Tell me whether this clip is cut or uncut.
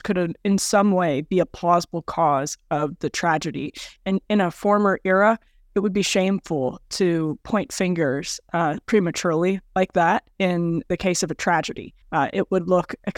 cut